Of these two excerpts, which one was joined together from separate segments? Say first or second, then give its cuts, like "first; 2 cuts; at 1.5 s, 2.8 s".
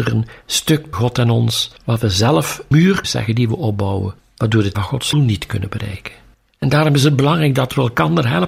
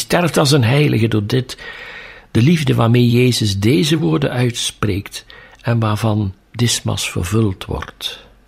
first; 8 cuts; at 0.9 s, 1.8 s, 2.7 s, 3.0 s, 4.2 s, 4.7 s, 5.1 s, 6.3 s